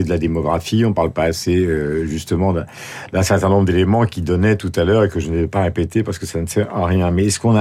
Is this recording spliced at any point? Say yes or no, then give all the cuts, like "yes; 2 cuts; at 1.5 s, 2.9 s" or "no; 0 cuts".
no; 0 cuts